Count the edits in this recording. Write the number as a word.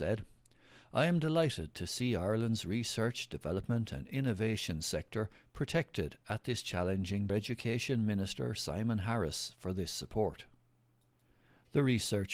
one